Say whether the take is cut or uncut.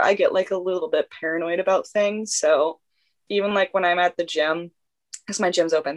uncut